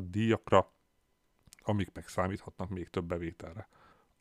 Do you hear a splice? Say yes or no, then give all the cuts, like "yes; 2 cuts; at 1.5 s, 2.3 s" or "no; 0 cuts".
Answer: no; 0 cuts